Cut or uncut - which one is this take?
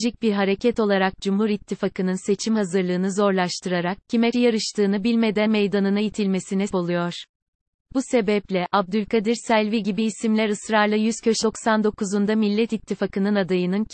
cut